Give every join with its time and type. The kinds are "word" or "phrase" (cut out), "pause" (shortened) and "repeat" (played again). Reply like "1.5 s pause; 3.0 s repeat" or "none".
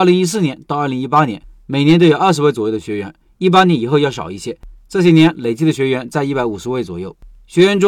none